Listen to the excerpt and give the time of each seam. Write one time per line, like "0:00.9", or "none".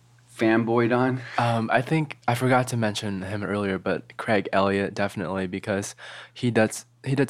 none